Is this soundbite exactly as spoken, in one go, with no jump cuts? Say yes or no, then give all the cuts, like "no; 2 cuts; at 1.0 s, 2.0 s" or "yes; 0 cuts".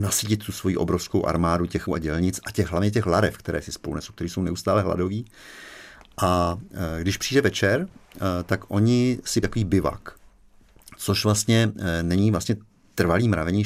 no; 2 cuts; at 1.9 s, 9.4 s